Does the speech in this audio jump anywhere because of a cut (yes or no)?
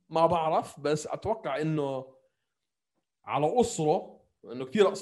no